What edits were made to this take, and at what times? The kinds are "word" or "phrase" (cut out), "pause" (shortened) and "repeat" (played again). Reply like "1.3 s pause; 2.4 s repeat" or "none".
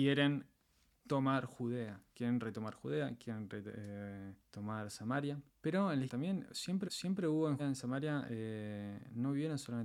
4.4 s pause; 5.5 s pause; 6.1 s word; 6.8 s repeat; 7.6 s word